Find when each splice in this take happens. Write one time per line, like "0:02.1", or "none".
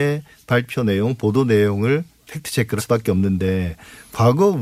0:02.8